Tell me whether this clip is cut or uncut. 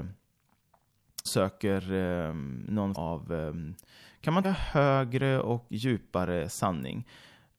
cut